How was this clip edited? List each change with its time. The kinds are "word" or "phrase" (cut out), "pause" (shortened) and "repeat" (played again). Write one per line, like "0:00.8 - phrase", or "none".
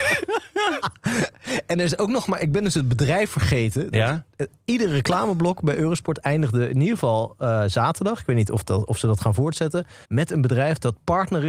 0:10.0 - pause